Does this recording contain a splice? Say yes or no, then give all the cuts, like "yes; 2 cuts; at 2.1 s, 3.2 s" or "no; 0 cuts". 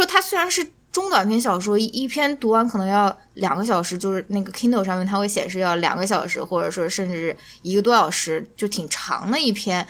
no; 0 cuts